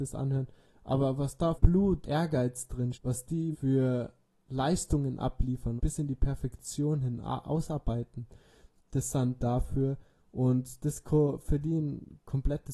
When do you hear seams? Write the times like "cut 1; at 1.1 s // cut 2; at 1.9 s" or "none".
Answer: cut 1; at 1.5 s // cut 2; at 2.0 s // cut 3; at 2.9 s // cut 4; at 3.5 s // cut 5; at 5.8 s // cut 6; at 9.4 s